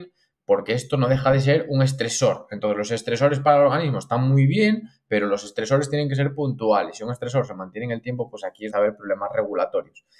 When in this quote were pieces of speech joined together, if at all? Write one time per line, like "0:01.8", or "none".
0:08.7